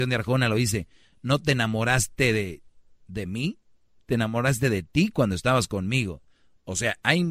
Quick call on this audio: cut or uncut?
uncut